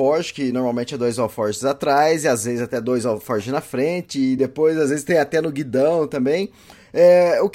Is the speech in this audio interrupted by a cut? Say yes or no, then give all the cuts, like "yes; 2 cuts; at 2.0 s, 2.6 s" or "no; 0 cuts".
no; 0 cuts